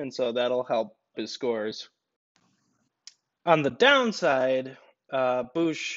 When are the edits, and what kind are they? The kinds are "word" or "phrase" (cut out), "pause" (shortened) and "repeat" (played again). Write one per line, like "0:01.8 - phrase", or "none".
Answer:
0:01.1 - phrase